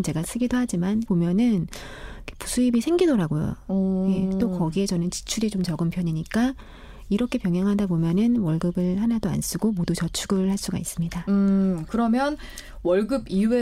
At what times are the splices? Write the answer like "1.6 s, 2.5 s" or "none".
1.1 s